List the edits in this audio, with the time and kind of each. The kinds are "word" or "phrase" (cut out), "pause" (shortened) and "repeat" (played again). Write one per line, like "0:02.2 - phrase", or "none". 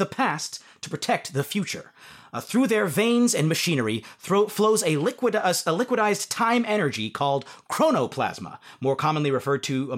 none